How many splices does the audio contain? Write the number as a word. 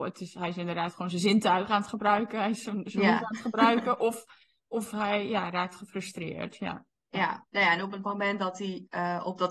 one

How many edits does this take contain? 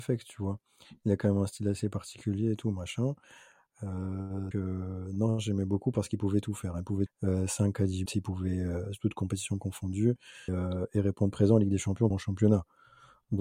five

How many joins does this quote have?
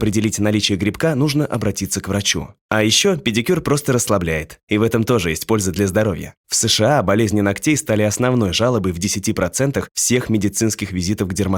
zero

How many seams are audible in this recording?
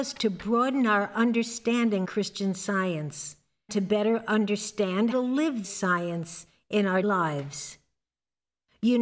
five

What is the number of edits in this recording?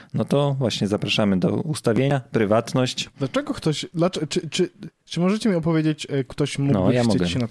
one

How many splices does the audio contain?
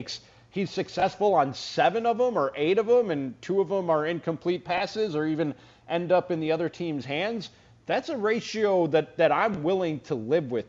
zero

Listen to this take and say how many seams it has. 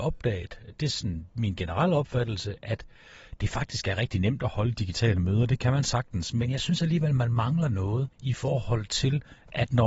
one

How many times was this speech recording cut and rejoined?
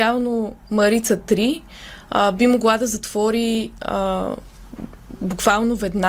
zero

